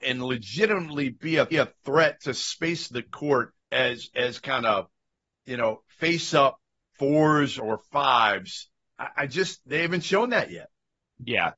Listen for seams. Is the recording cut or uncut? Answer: cut